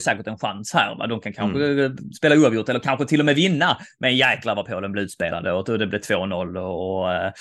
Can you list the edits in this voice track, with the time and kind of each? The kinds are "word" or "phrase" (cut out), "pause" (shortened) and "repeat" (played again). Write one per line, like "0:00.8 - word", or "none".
none